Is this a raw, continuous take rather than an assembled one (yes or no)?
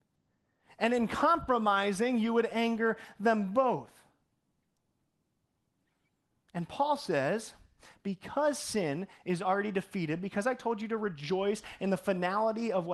yes